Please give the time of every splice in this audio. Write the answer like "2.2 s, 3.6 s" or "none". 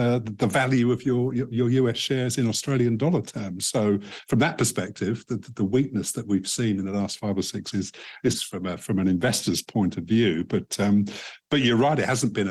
7.7 s, 8.3 s